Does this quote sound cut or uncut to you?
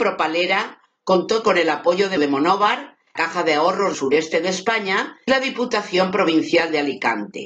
cut